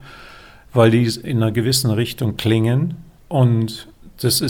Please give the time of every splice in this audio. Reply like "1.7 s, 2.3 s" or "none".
none